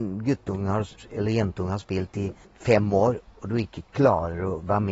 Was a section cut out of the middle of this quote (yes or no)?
yes